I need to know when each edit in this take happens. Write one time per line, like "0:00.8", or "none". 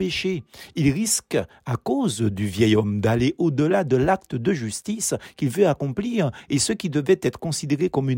none